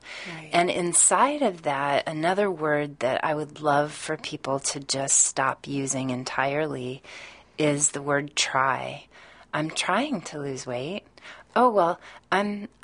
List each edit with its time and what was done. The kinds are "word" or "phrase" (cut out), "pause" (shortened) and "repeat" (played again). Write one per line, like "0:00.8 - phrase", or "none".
none

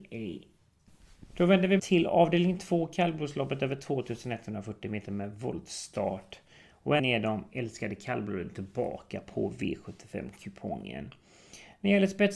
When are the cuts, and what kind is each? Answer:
0:01.8 - word
0:07.0 - word

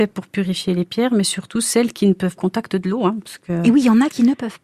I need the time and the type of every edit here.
0:02.4 - phrase

